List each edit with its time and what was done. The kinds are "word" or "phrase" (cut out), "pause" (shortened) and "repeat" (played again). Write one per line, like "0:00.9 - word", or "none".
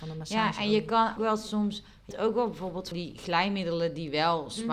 0:01.2 - word
0:02.1 - word
0:02.9 - word